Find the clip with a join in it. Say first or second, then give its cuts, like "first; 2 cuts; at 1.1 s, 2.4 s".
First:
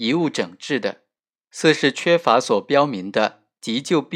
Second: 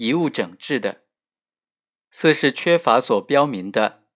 first; 1 cut; at 1.2 s